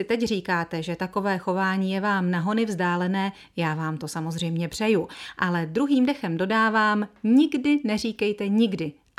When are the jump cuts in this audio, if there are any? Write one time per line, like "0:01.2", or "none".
none